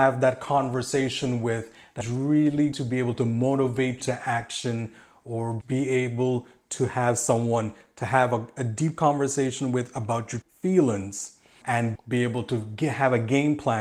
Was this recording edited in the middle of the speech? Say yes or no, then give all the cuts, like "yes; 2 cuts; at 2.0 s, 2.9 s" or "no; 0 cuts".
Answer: yes; 7 cuts; at 2.0 s, 2.7 s, 4.0 s, 5.6 s, 10.4 s, 11.6 s, 12.0 s